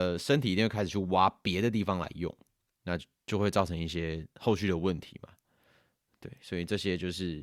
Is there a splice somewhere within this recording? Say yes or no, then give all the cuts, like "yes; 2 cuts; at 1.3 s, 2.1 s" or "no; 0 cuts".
no; 0 cuts